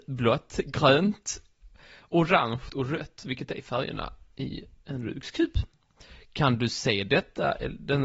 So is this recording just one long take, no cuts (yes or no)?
yes